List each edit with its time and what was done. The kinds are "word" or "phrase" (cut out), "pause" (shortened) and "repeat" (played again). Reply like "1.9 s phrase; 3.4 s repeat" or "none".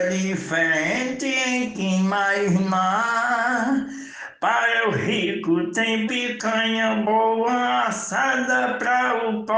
1.7 s word; 6.1 s word